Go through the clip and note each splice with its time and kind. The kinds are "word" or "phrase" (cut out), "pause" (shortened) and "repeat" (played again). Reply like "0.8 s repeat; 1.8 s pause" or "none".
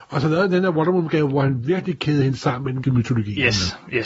2.8 s word

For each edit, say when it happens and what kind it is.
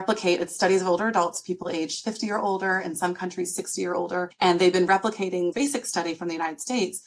5.5 s word

